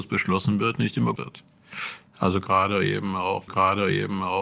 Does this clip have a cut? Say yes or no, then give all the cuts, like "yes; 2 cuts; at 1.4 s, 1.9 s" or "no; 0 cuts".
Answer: yes; 2 cuts; at 1.2 s, 3.5 s